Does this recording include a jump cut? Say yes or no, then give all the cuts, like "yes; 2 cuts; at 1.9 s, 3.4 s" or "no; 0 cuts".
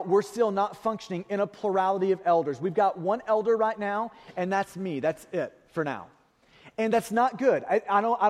no; 0 cuts